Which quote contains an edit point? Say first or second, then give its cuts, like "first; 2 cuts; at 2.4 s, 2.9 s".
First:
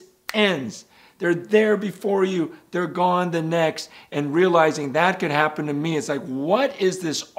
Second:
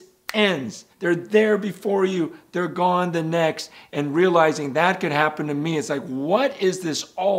second; 1 cut; at 0.9 s